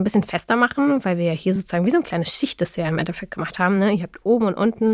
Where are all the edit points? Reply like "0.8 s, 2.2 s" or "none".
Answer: none

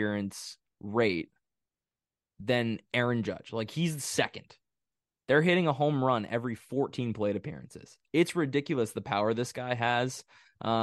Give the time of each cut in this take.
none

